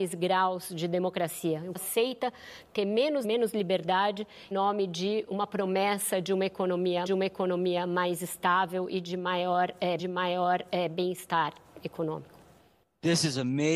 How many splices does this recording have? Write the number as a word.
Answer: six